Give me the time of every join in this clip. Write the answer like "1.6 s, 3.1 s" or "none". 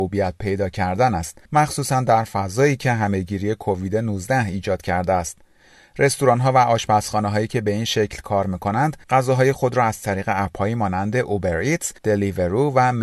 1.4 s, 9.0 s, 12.0 s